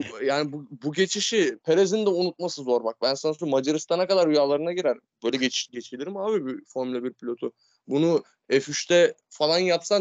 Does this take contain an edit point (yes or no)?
no